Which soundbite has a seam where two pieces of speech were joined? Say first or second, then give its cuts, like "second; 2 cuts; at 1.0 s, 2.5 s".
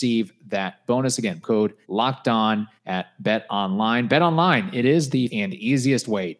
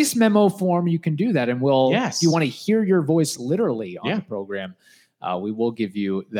first; 4 cuts; at 1.4 s, 1.8 s, 2.8 s, 5.3 s